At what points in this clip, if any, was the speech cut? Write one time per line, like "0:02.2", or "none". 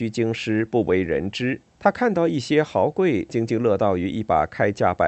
0:01.7